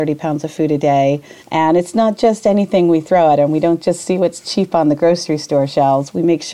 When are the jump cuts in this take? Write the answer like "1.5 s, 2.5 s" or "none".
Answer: 1.4 s